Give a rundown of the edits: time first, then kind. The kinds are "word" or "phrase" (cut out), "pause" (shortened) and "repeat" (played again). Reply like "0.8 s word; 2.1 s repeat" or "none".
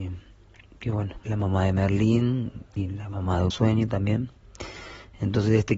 1.3 s word; 3.5 s word